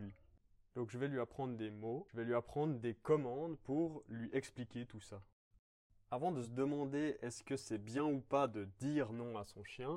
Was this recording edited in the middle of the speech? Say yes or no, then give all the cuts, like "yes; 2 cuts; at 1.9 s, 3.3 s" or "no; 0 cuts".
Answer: no; 0 cuts